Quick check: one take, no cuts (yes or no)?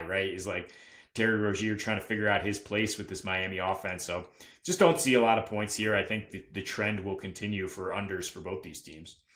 yes